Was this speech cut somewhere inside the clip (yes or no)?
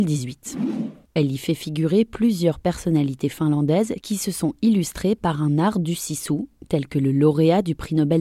no